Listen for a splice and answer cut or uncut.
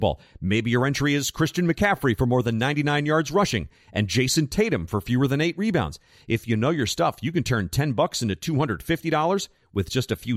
uncut